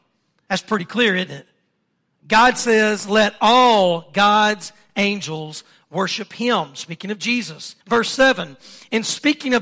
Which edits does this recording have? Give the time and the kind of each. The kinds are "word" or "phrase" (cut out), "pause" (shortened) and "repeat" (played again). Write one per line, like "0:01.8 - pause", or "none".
0:07.8 - pause